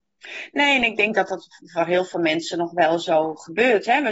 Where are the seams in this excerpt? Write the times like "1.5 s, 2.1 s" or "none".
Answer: none